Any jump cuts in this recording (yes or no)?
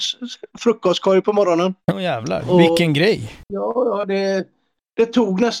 no